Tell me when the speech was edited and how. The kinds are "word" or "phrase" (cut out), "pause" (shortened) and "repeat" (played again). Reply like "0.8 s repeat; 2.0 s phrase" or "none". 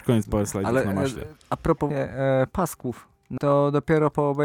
1.9 s word; 3.4 s word